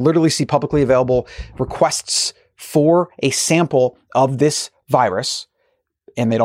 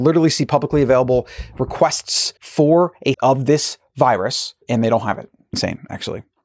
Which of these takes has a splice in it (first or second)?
second